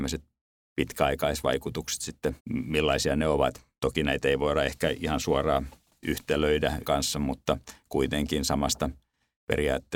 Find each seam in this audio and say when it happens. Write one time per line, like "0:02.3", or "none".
0:02.4
0:06.8